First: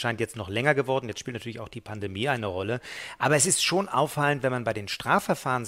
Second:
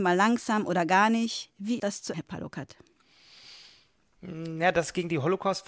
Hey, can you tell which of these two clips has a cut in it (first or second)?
second